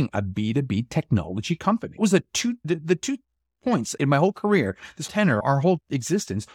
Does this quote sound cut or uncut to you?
cut